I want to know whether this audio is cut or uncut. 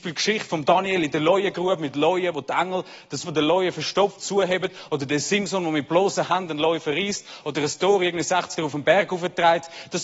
cut